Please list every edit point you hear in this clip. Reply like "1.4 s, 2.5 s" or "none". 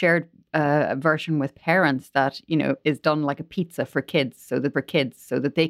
4.7 s